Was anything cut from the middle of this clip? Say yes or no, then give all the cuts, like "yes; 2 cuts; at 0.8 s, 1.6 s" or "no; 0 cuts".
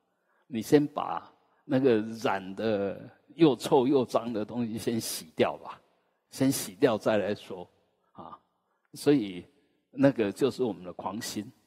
yes; 1 cut; at 6.3 s